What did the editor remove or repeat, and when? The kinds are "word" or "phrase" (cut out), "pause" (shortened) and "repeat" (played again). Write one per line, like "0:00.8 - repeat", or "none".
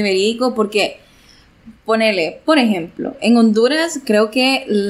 0:01.8 - pause